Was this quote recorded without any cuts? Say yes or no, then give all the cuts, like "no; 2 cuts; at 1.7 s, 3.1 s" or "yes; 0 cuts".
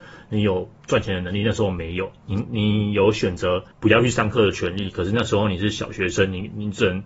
no; 1 cut; at 3.7 s